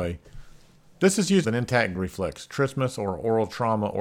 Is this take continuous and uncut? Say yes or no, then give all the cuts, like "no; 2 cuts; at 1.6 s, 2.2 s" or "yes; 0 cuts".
no; 2 cuts; at 1.4 s, 1.9 s